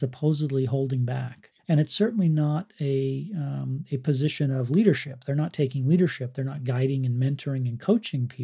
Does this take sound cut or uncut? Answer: cut